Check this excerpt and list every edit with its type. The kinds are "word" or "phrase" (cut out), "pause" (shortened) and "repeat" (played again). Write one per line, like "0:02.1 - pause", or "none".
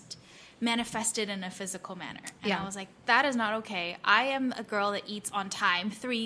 none